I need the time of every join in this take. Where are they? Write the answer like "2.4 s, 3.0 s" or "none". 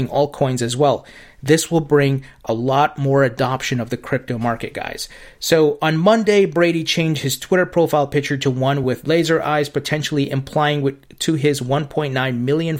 none